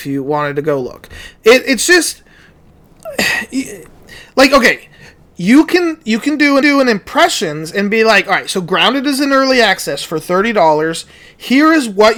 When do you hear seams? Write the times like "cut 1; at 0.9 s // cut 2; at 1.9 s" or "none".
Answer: cut 1; at 6.6 s